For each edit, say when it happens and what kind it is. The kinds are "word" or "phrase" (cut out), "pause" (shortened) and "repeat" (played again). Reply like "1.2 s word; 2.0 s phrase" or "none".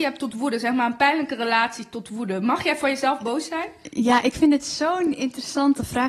none